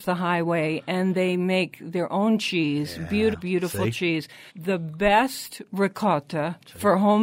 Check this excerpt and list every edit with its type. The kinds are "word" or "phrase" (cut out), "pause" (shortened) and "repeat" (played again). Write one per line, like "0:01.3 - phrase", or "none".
0:03.3 - word
0:04.5 - pause